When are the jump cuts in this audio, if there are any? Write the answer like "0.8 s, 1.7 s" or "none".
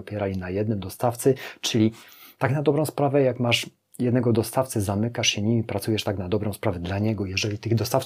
none